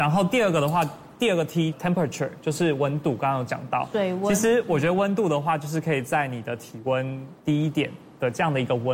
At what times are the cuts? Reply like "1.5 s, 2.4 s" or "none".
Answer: 1.7 s, 7.4 s